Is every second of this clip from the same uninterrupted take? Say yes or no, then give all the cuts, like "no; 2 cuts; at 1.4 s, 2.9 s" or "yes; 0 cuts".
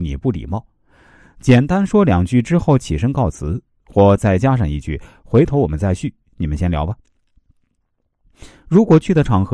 yes; 0 cuts